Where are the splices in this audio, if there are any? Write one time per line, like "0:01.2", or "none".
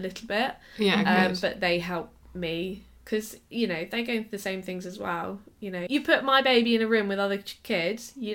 0:02.2
0:05.9